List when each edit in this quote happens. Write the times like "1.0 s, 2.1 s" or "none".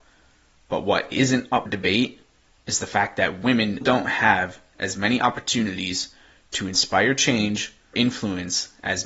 1.7 s, 3.8 s, 7.9 s